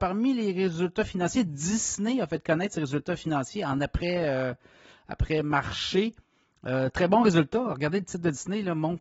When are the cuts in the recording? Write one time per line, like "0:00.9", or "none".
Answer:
none